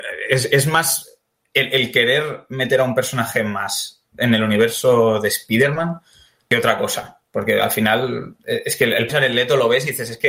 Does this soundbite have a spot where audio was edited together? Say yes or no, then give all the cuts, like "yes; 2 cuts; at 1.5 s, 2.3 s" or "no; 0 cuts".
yes; 1 cut; at 9.1 s